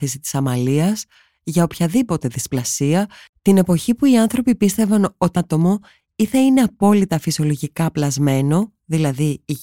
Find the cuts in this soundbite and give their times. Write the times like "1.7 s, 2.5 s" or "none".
5.4 s